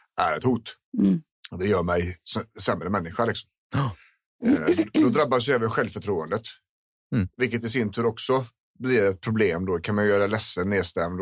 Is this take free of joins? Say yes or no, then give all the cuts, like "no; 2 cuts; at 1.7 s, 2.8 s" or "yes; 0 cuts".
yes; 0 cuts